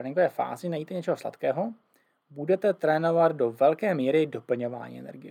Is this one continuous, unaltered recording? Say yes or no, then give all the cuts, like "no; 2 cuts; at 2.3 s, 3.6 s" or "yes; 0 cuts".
yes; 0 cuts